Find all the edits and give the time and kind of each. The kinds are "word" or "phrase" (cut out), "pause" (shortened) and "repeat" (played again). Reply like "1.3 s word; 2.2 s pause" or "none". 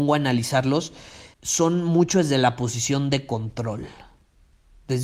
1.3 s pause